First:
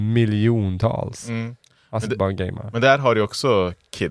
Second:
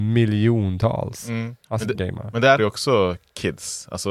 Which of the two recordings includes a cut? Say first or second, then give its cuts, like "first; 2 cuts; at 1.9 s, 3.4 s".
second; 3 cuts; at 1.6 s, 1.9 s, 2.6 s